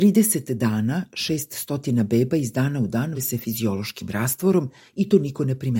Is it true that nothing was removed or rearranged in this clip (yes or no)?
no